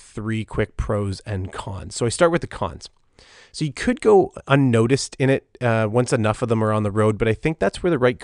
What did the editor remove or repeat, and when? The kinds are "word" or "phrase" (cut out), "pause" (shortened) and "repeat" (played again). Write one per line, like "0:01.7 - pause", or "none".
none

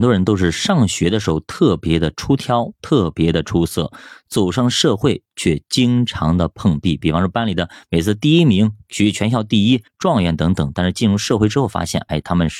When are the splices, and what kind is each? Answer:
0:09.9 - pause

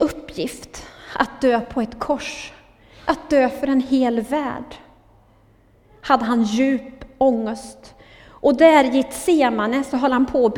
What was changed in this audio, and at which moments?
none

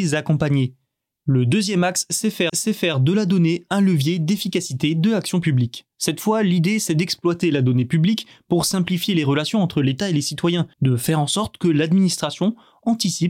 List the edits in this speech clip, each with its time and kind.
0:02.5 - repeat
0:10.7 - pause

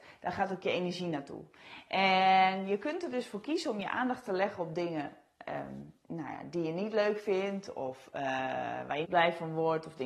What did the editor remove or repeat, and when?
0:09.0 - word

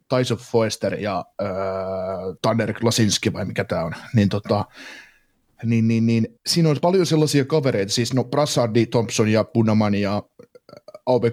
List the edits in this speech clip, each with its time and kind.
0:02.4 - pause
0:06.4 - pause

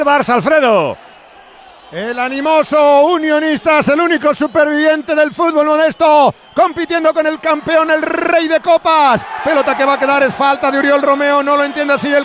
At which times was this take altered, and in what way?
none

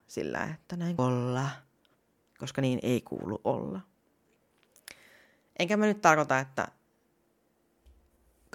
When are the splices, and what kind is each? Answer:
0:01.0 - word

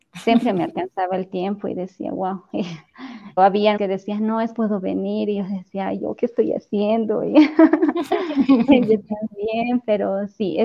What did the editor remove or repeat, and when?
0:03.4 - word
0:03.8 - word
0:04.5 - phrase

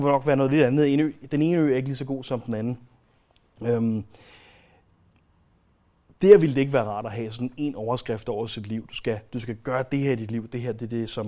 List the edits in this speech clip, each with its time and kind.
none

